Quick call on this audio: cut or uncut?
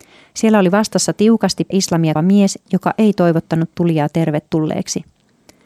cut